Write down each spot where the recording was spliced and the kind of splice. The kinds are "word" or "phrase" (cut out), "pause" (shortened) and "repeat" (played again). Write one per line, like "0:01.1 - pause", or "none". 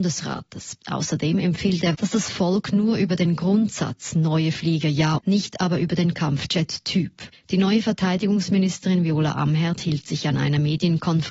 0:01.9 - word
0:05.2 - phrase
0:07.3 - pause